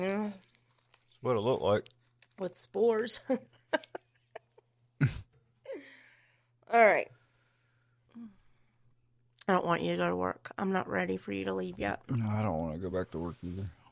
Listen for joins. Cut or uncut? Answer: uncut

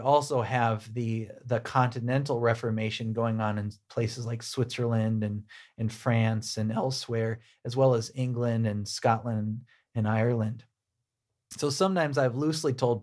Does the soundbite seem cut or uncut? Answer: uncut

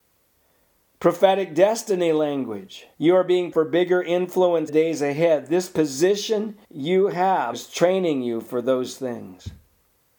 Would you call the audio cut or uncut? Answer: cut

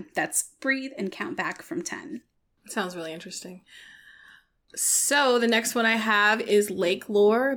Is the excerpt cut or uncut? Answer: uncut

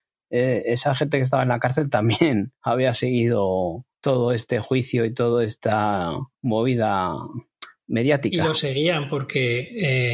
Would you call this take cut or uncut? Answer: cut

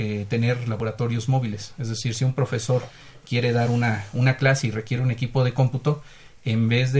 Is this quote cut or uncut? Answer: uncut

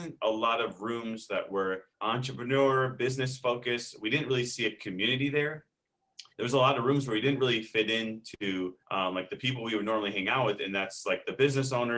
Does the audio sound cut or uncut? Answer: cut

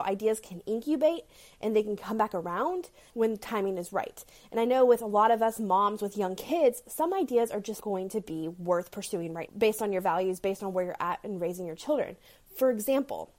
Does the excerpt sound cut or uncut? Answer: cut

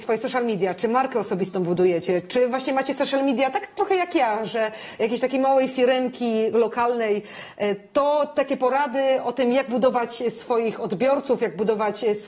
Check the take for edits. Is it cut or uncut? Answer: uncut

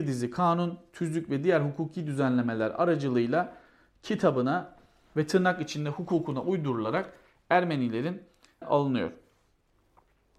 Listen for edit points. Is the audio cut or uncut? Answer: cut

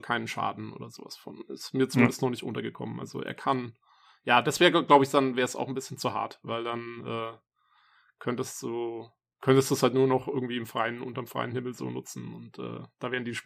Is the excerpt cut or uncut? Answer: uncut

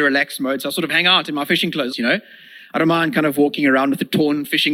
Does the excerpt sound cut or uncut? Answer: cut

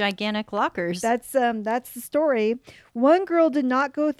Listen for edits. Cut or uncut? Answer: uncut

